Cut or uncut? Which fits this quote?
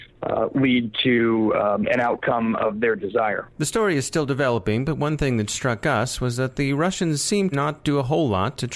cut